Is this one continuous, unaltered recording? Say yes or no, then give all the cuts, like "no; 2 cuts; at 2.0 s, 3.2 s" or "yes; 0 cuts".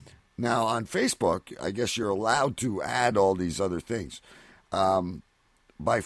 yes; 0 cuts